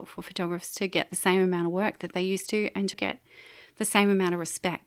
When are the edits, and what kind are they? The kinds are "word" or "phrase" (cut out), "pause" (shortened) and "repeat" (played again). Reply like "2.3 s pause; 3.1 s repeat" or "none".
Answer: 2.9 s word